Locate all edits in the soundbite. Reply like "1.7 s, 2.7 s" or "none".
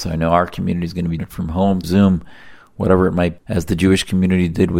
1.2 s, 1.8 s, 3.4 s